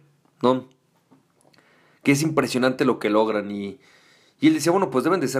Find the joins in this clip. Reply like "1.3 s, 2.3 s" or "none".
none